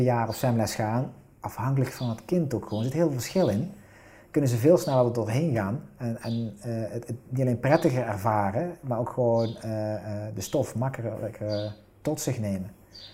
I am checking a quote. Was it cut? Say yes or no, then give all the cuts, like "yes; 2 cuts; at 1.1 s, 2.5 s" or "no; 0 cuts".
no; 0 cuts